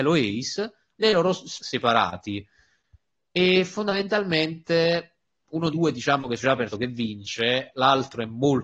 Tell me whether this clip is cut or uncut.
cut